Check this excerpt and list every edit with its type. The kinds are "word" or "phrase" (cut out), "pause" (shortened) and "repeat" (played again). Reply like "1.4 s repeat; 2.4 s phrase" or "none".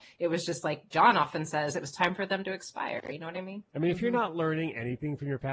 0.9 s word; 3.7 s pause